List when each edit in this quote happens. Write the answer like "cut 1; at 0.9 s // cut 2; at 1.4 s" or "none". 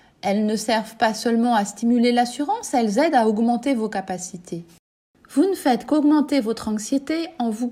none